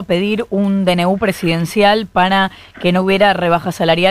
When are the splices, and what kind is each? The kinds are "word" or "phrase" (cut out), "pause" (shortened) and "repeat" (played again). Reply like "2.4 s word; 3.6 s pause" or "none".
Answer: none